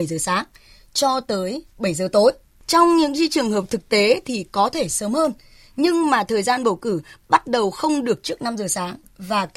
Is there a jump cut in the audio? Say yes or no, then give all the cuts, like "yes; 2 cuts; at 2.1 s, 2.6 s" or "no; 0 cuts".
no; 0 cuts